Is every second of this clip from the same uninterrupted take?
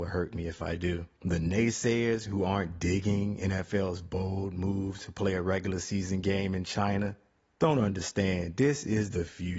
yes; 0 cuts

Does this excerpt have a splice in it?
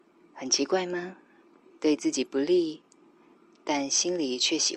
yes; 1 cut; at 1.4 s

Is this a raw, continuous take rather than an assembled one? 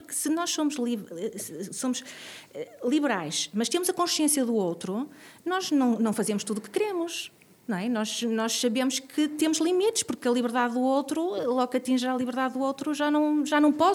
yes; 0 cuts

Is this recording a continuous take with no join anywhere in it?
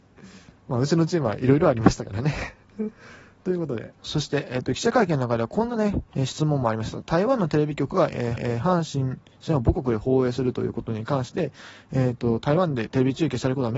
no; 3 cuts; at 4.0 s, 6.1 s, 8.4 s

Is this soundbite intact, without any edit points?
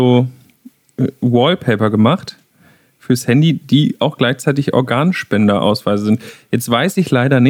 yes; 0 cuts

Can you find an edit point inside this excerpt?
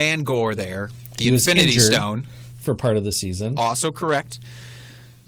no; 0 cuts

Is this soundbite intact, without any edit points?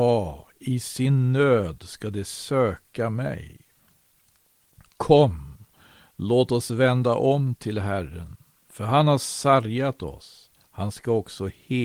yes; 0 cuts

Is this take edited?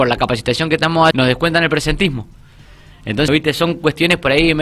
yes; 2 cuts; at 1.1 s, 3.3 s

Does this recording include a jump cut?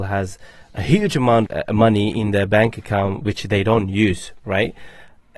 yes; 1 cut; at 1.5 s

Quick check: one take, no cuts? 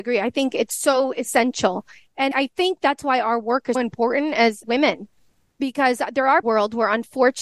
no; 4 cuts; at 2.3 s, 3.7 s, 4.6 s, 6.4 s

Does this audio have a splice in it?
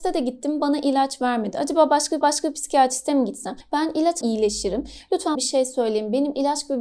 yes; 3 cuts; at 2.2 s, 4.2 s, 5.3 s

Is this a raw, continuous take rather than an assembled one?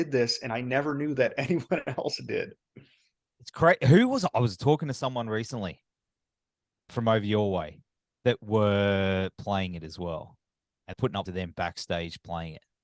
no; 4 cuts; at 6.9 s, 8.0 s, 10.9 s, 11.3 s

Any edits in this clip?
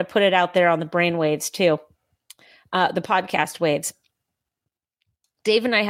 no; 0 cuts

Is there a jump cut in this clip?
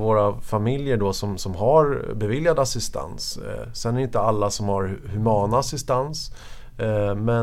no; 0 cuts

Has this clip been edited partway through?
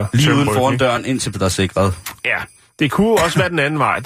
yes; 2 cuts; at 1.3 s, 2.2 s

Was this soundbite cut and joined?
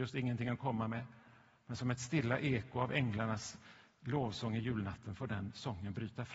no; 0 cuts

